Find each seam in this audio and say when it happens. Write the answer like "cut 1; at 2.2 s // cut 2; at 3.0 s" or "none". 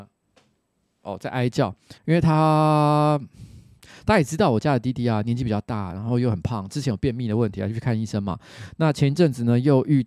cut 1; at 2.0 s